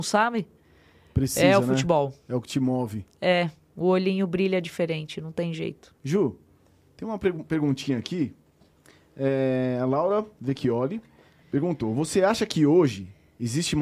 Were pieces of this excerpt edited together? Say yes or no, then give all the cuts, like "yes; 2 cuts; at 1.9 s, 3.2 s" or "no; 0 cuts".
yes; 3 cuts; at 2.2 s, 5.9 s, 11.3 s